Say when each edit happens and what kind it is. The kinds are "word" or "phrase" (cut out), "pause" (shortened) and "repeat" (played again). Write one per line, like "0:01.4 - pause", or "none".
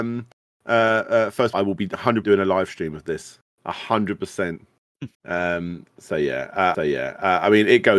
0:01.5 - phrase
0:02.2 - word
0:05.1 - pause
0:06.7 - repeat